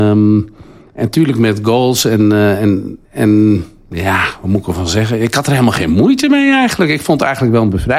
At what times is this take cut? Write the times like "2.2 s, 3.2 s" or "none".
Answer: 3.0 s